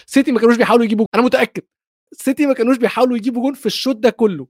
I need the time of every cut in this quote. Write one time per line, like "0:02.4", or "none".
0:01.1
0:02.1

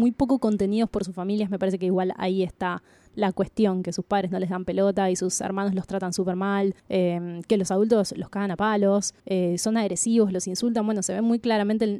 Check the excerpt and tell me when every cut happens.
0:06.8
0:09.2

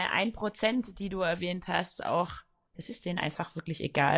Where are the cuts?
none

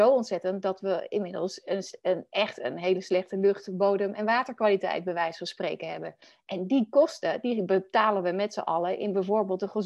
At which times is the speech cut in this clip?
none

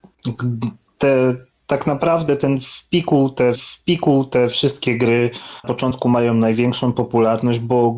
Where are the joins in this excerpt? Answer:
0:03.6
0:05.6

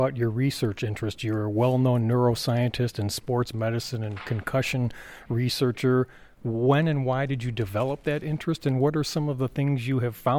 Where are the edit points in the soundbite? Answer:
none

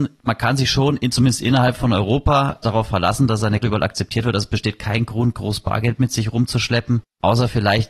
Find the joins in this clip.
0:02.6
0:03.6

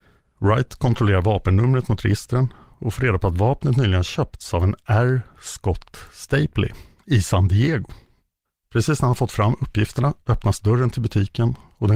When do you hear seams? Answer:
none

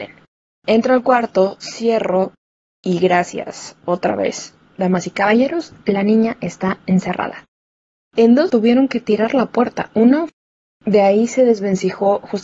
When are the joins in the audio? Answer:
0:08.5

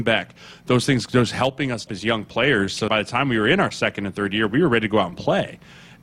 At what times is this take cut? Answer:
0:01.9
0:02.9

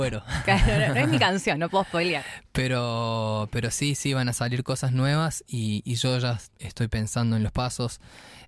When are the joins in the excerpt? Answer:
0:07.5

